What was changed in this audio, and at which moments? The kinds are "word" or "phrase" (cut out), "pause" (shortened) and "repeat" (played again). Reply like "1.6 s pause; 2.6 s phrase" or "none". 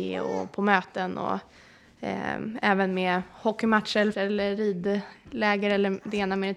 4.1 s word